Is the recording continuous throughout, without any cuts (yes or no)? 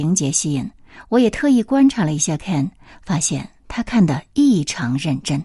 yes